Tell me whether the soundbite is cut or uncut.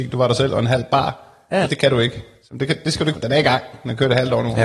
cut